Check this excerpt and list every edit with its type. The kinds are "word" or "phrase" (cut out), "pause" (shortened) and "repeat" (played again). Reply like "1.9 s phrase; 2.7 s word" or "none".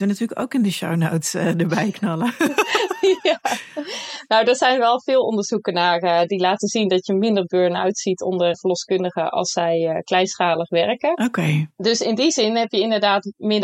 8.5 s word